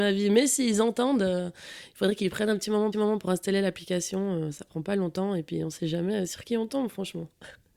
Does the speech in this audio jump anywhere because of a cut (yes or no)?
yes